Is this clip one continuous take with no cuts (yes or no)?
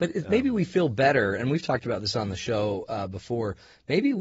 yes